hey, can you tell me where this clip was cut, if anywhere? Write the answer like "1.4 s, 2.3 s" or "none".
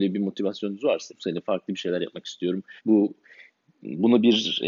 1.1 s, 2.8 s